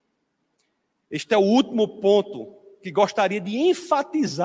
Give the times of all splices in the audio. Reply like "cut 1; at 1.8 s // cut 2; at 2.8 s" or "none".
none